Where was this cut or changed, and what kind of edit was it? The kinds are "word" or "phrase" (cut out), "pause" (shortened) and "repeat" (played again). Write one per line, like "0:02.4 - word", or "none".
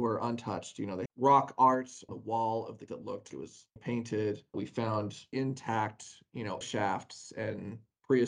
0:01.1 - word
0:02.1 - word
0:02.9 - word
0:03.3 - word
0:03.8 - word
0:04.5 - word
0:05.3 - word
0:06.6 - word